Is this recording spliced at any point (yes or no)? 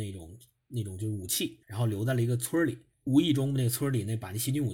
yes